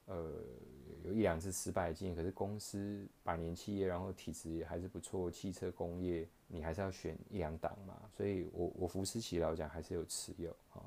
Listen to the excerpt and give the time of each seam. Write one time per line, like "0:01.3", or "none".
0:06.4